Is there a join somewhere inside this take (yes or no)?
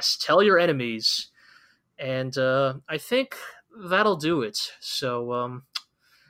no